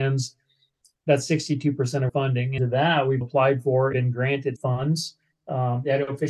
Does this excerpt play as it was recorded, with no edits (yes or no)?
no